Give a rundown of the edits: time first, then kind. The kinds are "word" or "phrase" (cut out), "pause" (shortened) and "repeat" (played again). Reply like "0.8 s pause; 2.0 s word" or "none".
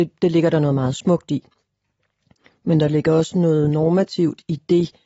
none